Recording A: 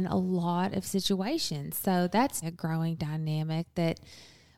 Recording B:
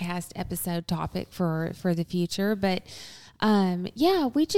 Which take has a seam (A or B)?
A